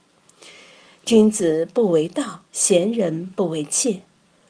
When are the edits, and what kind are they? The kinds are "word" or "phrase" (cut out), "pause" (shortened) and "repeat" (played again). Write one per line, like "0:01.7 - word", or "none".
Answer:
0:02.5 - pause